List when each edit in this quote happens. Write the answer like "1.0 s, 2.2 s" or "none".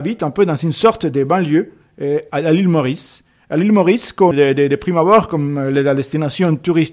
4.3 s